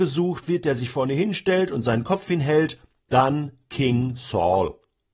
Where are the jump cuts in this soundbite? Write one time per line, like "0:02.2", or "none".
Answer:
none